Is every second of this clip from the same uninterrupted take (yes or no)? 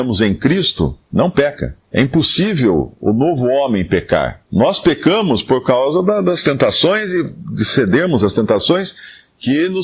no